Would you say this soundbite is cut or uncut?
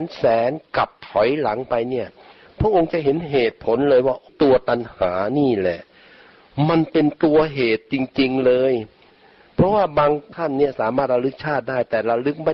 uncut